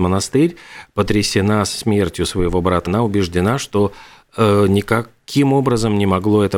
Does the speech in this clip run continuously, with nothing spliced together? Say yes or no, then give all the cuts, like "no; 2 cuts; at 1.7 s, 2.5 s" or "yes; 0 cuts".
no; 1 cut; at 2.9 s